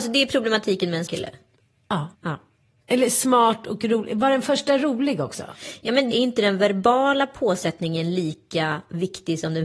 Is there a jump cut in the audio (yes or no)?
yes